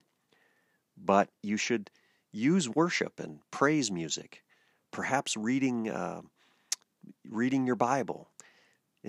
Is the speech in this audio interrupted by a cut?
no; 0 cuts

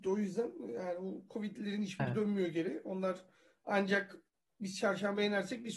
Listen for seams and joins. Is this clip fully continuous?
yes; 0 cuts

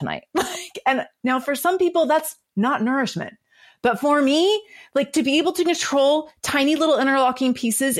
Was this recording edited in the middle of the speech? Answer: no; 0 cuts

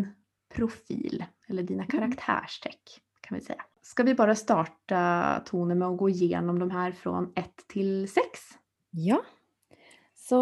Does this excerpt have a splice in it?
yes; 3 cuts; at 3.1 s, 3.7 s, 8.7 s

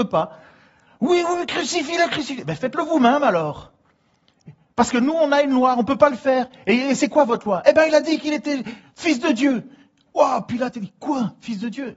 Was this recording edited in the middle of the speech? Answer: no; 0 cuts

